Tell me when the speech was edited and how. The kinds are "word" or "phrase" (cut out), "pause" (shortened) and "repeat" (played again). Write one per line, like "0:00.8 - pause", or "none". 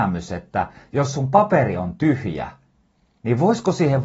none